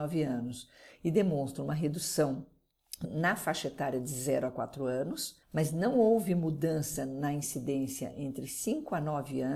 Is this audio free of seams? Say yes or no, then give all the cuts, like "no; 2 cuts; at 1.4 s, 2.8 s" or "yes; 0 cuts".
no; 2 cuts; at 3.0 s, 5.4 s